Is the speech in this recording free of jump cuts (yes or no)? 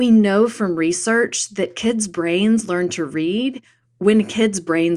yes